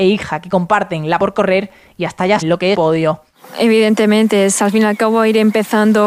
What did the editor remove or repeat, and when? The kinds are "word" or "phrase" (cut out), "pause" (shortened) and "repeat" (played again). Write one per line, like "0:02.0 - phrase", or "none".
0:01.2 - word
0:02.4 - word
0:02.7 - phrase